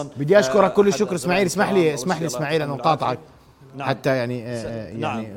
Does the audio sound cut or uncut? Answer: uncut